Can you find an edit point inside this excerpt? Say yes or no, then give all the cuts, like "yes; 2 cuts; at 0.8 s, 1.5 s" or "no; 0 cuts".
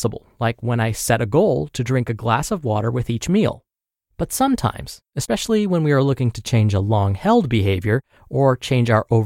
no; 0 cuts